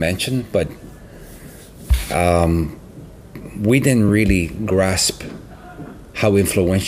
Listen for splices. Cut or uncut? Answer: uncut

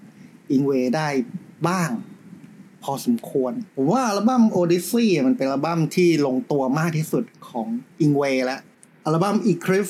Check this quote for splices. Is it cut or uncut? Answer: cut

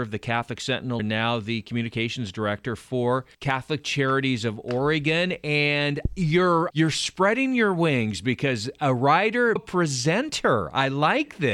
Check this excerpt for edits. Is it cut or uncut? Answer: cut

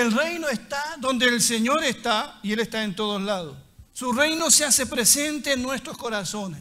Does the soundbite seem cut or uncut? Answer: cut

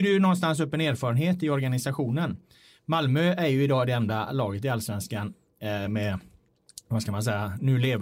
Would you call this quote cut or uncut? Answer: cut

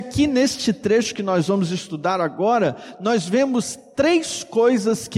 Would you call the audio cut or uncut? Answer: uncut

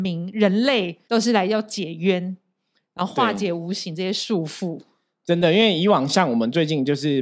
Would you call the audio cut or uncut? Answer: cut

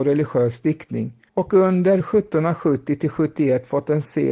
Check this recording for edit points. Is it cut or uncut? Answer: cut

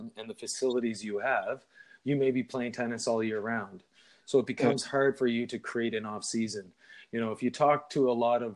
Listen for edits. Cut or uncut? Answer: uncut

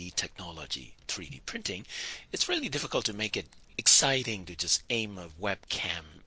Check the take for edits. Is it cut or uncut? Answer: cut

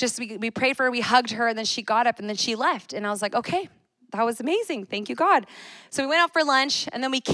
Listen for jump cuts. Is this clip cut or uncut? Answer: uncut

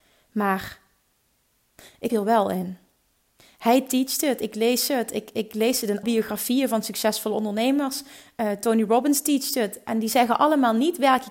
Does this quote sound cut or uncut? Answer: cut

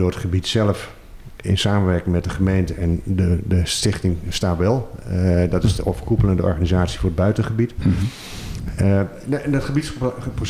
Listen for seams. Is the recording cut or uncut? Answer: uncut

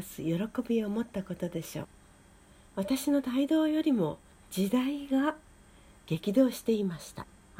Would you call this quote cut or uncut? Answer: uncut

